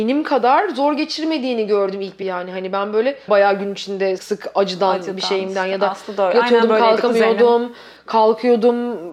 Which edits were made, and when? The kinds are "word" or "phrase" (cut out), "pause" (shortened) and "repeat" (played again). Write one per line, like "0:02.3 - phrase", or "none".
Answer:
0:02.2 - word
0:03.3 - phrase
0:04.2 - word